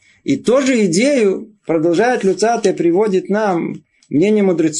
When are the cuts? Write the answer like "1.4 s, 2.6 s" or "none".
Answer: none